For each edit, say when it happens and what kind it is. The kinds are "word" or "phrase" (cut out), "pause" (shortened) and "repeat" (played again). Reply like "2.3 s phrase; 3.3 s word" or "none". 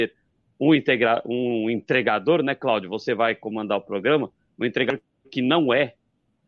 none